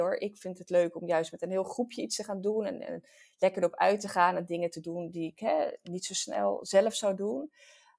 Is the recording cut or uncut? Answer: uncut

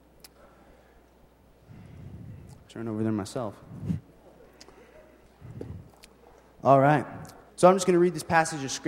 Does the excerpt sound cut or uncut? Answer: cut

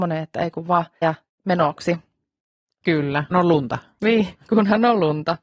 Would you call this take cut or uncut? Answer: cut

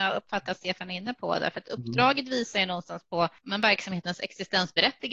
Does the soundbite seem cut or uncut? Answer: cut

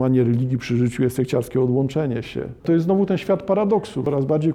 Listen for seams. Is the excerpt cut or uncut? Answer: cut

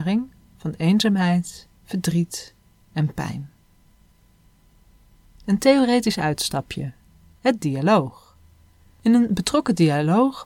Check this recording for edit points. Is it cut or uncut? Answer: uncut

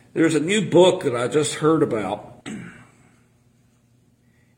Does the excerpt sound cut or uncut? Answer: cut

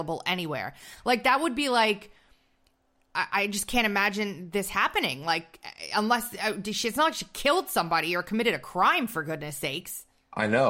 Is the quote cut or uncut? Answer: uncut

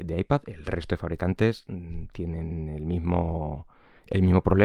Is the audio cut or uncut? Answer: uncut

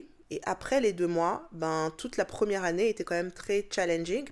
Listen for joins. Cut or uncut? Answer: uncut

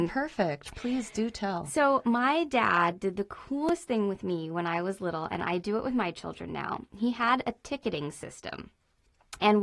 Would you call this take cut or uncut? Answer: uncut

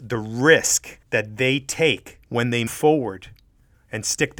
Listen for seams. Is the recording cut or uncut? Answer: cut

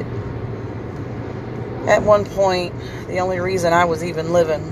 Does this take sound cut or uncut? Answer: uncut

